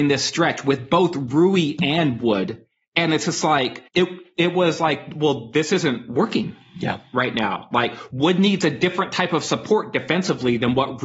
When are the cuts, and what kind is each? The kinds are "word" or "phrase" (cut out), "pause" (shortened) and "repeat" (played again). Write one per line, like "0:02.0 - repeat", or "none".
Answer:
0:03.9 - pause